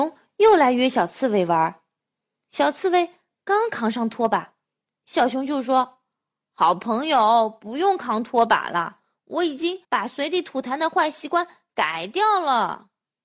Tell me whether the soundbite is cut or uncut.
uncut